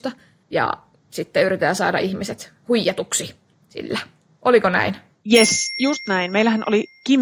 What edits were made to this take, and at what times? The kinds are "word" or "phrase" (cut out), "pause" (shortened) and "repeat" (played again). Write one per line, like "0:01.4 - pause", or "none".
none